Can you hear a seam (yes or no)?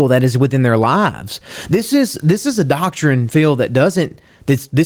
no